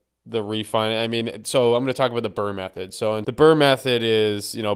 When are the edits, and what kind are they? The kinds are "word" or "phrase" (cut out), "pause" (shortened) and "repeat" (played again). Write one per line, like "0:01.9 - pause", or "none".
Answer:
0:03.2 - word